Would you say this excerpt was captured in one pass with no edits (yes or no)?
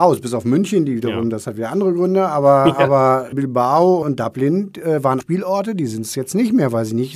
no